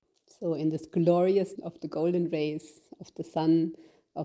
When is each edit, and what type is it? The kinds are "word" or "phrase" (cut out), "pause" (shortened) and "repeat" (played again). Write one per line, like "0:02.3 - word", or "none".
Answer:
0:01.6 - word